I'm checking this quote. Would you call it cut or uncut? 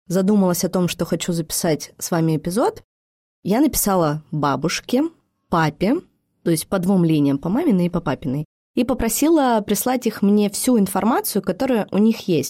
uncut